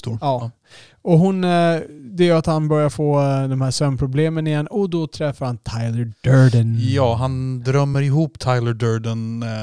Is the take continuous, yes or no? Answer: yes